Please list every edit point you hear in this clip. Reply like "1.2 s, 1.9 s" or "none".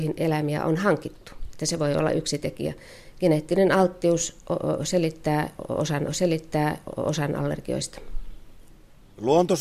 6.1 s